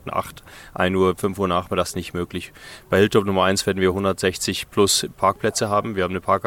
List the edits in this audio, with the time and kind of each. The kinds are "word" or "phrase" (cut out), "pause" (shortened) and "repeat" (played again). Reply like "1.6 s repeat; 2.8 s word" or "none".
none